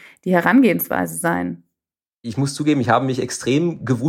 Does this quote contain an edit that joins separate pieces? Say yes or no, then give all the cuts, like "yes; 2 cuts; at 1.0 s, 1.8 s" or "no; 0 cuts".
no; 0 cuts